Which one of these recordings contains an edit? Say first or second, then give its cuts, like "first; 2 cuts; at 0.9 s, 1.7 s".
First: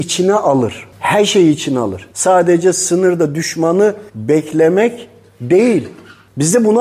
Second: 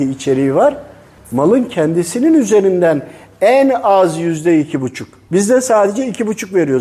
first; 3 cuts; at 0.9 s, 2.1 s, 4.1 s